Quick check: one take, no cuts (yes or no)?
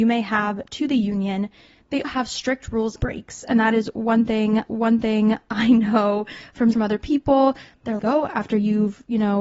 no